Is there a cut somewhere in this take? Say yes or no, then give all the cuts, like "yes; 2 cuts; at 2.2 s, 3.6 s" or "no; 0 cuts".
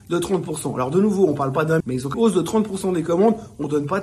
yes; 2 cuts; at 1.8 s, 2.1 s